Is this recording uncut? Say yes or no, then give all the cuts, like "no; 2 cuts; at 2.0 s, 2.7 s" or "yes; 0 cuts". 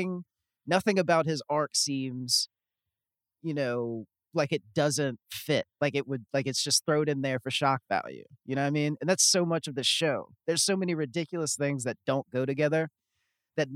yes; 0 cuts